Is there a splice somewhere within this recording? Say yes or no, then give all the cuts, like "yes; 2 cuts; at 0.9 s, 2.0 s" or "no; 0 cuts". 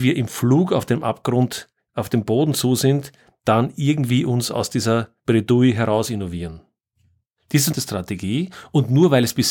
yes; 1 cut; at 7.7 s